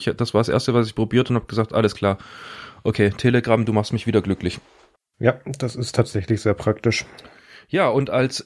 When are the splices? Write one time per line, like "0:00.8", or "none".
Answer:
0:05.0